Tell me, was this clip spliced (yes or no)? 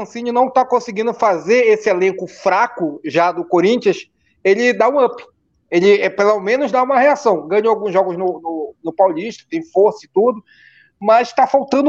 no